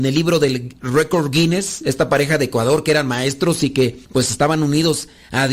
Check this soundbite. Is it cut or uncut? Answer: cut